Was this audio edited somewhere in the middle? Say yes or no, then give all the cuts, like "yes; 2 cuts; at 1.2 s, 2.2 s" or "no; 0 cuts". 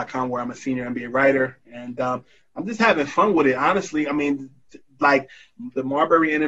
no; 0 cuts